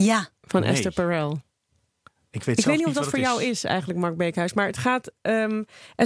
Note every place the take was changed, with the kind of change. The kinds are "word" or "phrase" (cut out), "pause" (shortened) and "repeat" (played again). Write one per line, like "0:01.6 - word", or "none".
none